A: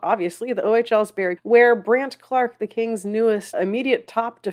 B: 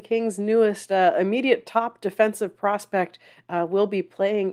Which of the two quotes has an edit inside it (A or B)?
A